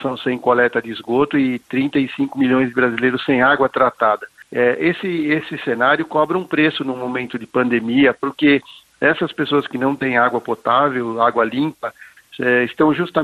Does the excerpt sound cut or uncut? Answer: uncut